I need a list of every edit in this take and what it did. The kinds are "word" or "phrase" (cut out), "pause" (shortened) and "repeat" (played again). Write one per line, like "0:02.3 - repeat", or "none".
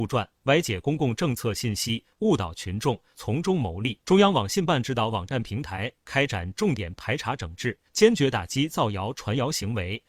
0:04.0 - pause
0:07.9 - pause